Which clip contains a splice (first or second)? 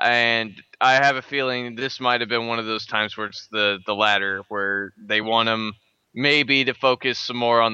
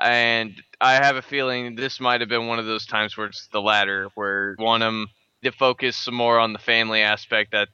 second